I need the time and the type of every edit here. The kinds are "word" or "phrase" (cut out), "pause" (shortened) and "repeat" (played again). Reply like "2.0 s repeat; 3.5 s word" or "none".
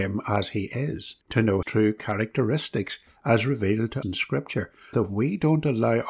1.2 s pause; 1.6 s word; 4.0 s word; 4.9 s word